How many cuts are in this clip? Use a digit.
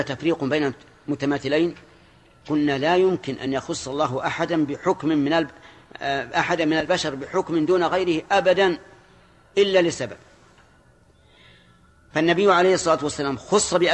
0